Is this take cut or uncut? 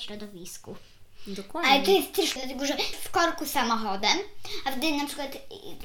cut